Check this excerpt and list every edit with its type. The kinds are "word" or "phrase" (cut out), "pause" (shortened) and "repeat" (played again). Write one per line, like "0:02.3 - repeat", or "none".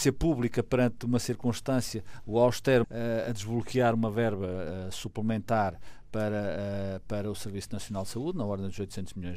0:02.2 - word
0:02.8 - phrase